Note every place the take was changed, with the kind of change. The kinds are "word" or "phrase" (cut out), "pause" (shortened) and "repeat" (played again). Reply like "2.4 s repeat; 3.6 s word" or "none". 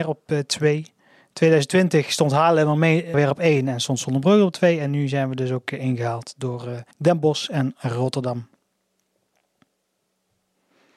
3.1 s phrase; 6.9 s pause